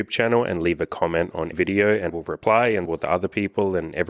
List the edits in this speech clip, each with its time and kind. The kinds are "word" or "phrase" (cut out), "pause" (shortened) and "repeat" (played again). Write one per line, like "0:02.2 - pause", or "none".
0:01.5 - word
0:02.1 - word
0:02.9 - word